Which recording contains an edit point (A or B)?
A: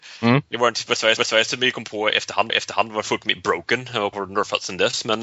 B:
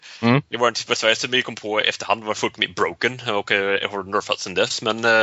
A